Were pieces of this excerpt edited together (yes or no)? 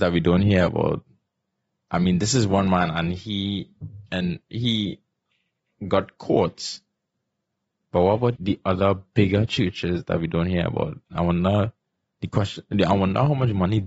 yes